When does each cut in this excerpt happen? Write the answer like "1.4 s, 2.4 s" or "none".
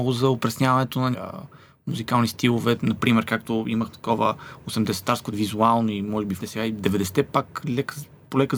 1.1 s, 3.9 s, 5.3 s, 6.4 s